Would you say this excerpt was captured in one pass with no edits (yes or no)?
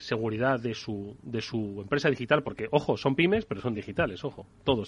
yes